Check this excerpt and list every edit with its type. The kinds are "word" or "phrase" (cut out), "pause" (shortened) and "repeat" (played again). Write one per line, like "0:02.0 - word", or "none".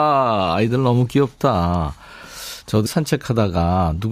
0:02.9 - word